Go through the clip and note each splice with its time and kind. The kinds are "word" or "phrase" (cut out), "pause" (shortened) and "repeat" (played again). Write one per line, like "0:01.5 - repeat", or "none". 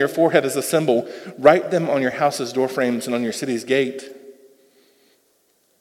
none